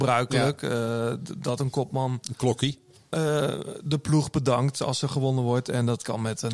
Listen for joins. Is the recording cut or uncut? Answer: uncut